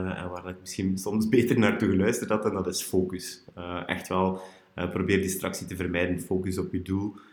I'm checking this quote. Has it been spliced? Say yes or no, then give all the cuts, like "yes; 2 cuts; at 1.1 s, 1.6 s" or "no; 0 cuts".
no; 0 cuts